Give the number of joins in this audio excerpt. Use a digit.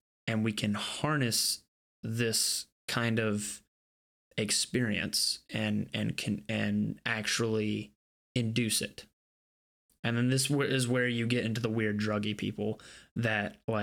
0